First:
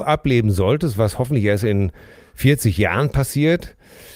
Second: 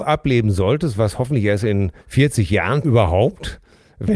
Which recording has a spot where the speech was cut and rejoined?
second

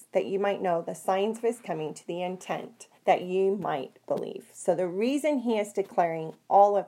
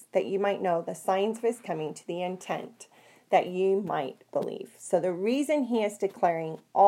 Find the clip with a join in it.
first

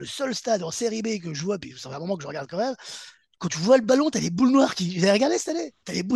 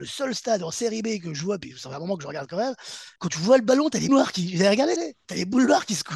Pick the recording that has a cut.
second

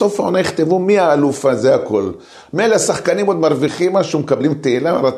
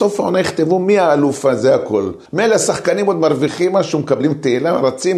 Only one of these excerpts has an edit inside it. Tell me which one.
second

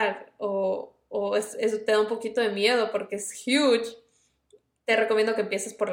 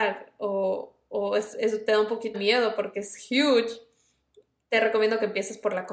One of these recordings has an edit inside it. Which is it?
second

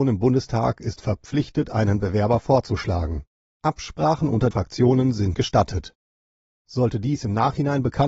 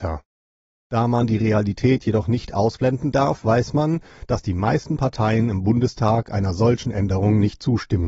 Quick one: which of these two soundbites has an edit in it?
first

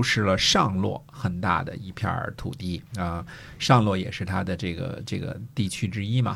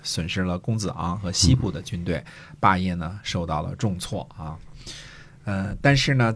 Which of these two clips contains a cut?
first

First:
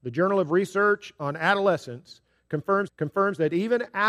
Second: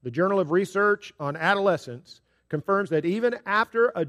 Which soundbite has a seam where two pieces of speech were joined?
first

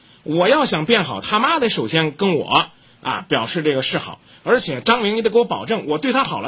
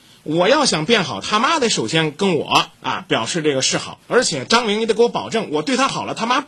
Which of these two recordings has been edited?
second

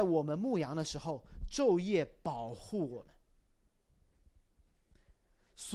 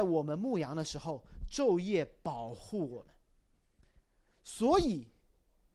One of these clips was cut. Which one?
second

